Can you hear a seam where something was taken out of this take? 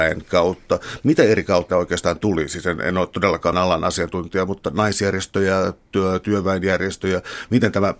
yes; 2 cuts; at 1.7 s, 3.5 s

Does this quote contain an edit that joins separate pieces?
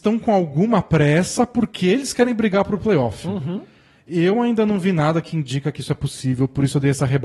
no; 0 cuts

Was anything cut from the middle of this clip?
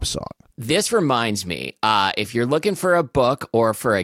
no; 0 cuts

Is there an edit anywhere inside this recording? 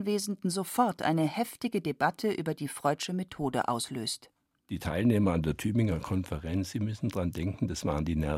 no; 0 cuts

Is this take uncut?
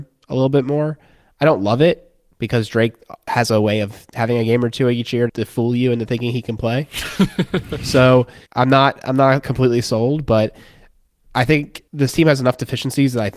no; 4 cuts; at 5.3 s, 8.5 s, 9.4 s, 11.9 s

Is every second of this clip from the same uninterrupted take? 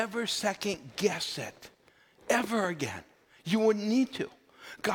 yes; 0 cuts

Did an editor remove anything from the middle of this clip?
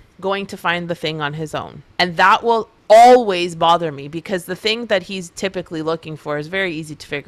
yes; 1 cut; at 1.9 s

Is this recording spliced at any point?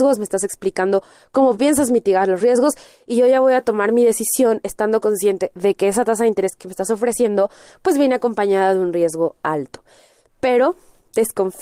no; 0 cuts

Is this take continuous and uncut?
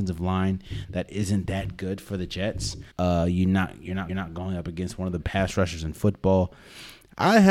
no; 3 cuts; at 2.9 s, 4.1 s, 5.2 s

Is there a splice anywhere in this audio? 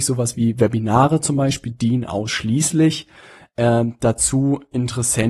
no; 0 cuts

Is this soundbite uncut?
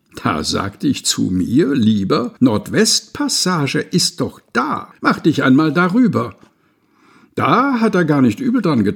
no; 2 cuts; at 2.4 s, 5.0 s

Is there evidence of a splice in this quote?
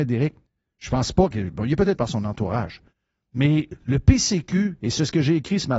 yes; 2 cuts; at 1.3 s, 2.0 s

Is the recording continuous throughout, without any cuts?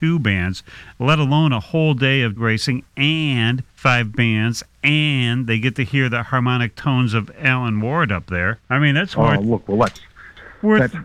no; 3 cuts; at 2.4 s, 3.7 s, 8.6 s

